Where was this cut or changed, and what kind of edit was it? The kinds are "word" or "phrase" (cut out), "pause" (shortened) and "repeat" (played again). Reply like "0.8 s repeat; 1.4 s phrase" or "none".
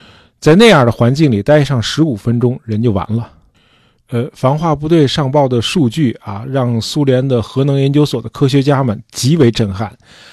none